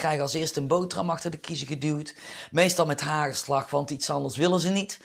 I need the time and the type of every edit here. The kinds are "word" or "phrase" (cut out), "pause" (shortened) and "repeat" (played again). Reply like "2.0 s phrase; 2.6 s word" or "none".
none